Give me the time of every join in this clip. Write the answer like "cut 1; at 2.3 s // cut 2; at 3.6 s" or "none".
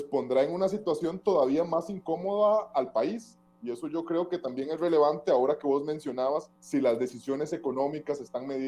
cut 1; at 6.6 s